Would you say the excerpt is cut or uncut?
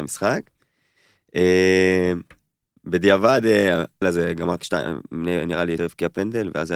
cut